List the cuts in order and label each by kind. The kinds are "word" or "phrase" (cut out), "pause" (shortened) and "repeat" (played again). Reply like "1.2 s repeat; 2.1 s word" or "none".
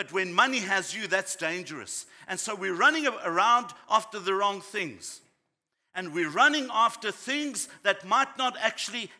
none